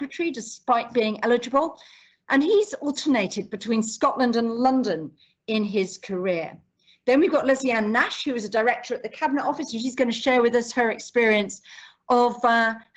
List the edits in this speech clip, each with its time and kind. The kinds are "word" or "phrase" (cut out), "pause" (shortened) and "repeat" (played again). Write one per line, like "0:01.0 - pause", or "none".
none